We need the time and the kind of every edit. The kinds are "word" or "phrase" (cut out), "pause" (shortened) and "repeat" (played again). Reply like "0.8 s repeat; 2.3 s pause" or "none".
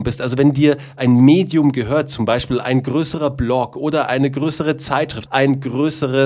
5.3 s word